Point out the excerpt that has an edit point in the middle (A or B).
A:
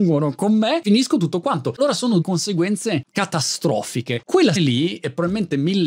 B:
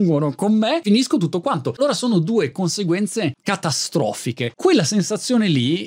A